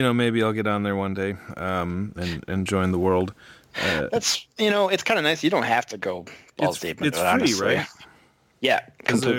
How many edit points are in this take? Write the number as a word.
zero